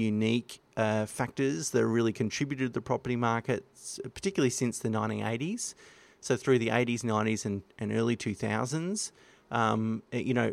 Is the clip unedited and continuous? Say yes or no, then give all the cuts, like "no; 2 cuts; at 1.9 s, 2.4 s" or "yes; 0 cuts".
yes; 0 cuts